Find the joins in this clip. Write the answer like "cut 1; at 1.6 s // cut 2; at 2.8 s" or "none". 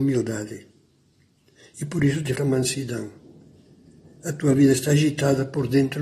cut 1; at 2.4 s